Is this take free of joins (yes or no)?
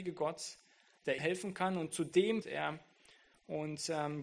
no